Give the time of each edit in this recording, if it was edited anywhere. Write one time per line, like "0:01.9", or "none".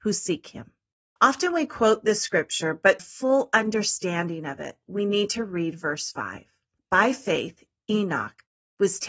0:03.0

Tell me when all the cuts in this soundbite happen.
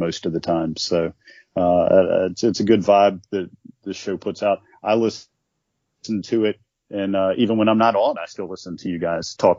none

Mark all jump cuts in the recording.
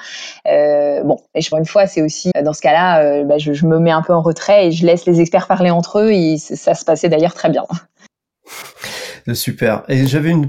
0:01.5
0:02.3

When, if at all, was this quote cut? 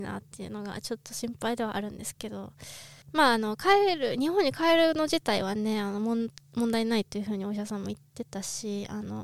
0:03.0

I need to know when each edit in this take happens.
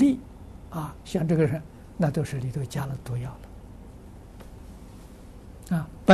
none

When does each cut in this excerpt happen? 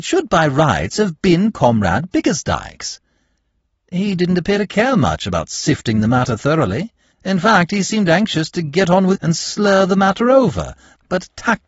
0:07.1
0:09.1

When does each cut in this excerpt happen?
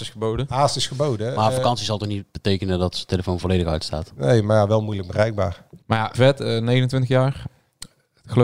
0:05.8
0:06.1

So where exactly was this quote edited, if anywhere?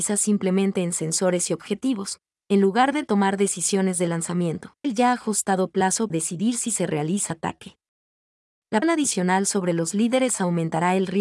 0:04.8
0:06.1
0:07.3
0:08.8

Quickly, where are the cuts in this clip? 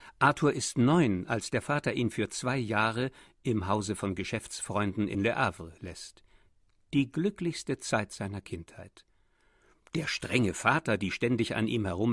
none

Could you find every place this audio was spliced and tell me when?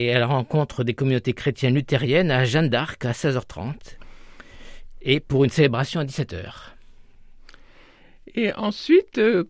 none

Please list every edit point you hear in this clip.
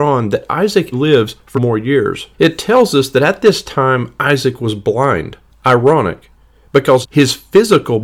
0:00.9
0:01.5
0:02.3
0:05.5
0:07.0

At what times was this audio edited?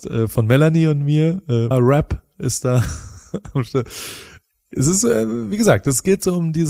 0:01.7

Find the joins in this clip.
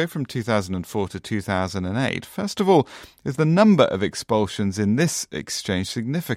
none

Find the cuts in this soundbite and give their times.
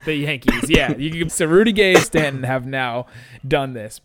0:01.3
0:02.0

